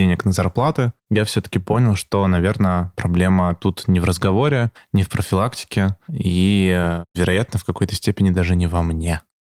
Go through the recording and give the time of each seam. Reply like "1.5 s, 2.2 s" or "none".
none